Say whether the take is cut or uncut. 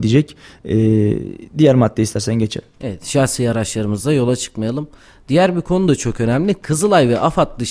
uncut